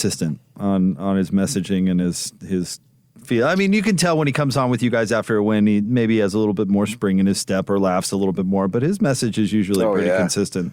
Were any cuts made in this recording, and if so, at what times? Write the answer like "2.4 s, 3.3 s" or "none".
none